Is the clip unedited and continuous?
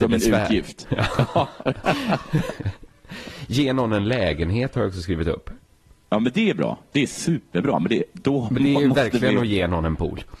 yes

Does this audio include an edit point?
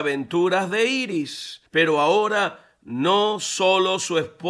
yes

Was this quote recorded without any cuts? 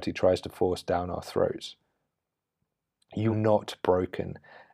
no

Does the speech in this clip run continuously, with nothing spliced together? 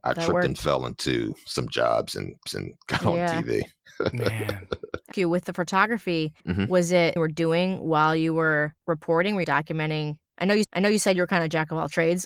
no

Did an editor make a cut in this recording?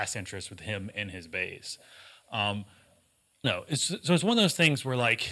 yes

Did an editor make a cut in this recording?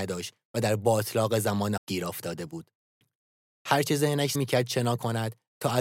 yes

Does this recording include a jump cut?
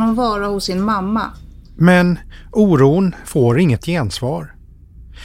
no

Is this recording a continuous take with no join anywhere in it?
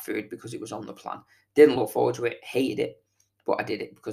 yes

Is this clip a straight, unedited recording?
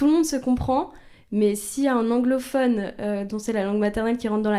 yes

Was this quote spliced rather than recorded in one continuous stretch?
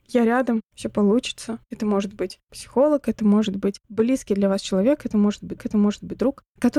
yes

